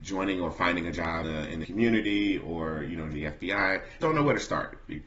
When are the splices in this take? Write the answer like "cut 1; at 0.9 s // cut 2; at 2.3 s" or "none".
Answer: cut 1; at 1.2 s // cut 2; at 1.6 s // cut 3; at 3.1 s // cut 4; at 4.0 s